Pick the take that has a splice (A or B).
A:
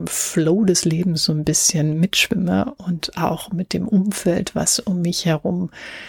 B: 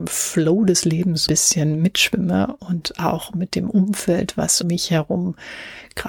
B